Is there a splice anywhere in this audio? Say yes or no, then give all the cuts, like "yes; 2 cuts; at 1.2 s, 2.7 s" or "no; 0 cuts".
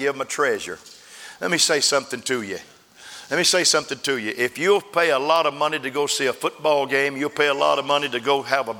no; 0 cuts